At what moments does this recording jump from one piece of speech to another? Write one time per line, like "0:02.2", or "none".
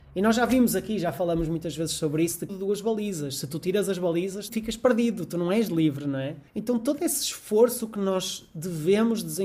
0:02.5
0:04.5
0:06.5